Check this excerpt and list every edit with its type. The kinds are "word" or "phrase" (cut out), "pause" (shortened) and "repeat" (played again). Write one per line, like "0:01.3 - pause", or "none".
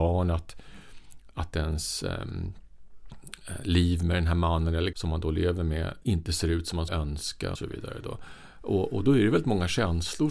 0:04.9 - word
0:06.0 - word
0:06.9 - word
0:07.6 - word